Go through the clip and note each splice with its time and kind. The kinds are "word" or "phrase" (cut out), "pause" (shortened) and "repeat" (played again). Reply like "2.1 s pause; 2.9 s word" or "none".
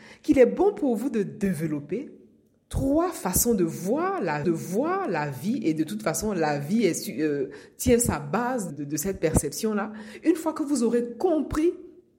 4.4 s repeat; 8.7 s word